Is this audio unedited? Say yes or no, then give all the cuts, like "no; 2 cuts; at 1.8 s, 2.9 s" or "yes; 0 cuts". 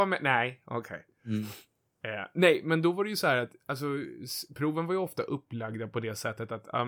yes; 0 cuts